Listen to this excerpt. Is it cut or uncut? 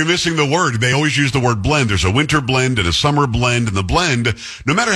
uncut